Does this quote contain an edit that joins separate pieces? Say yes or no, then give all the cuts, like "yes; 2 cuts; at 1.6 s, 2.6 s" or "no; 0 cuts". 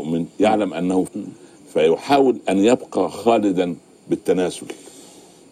yes; 1 cut; at 1.1 s